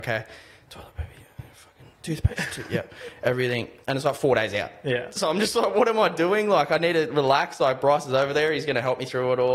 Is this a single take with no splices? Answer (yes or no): yes